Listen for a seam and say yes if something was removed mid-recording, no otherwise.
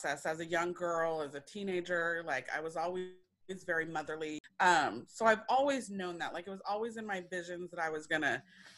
no